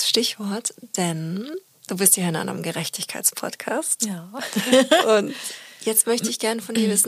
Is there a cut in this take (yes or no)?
no